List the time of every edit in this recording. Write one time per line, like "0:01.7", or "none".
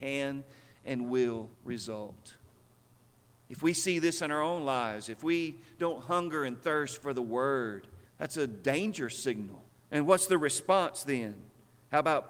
0:01.5
0:08.1
0:09.7